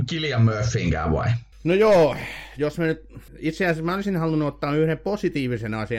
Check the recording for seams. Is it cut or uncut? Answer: cut